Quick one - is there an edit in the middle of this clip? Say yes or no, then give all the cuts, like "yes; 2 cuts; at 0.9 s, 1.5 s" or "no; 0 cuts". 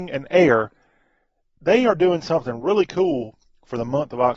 no; 0 cuts